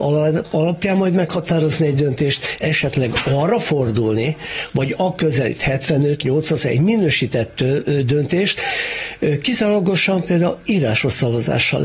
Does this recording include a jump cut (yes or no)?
yes